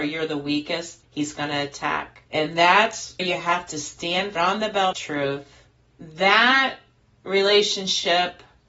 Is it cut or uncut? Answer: cut